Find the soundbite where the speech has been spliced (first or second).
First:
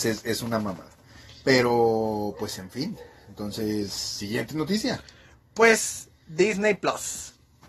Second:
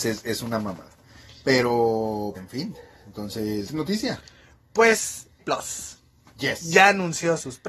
second